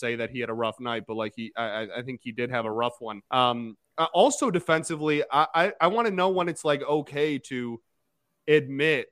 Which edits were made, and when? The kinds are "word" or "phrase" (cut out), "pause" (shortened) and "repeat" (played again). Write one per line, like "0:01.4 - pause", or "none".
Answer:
0:03.3 - pause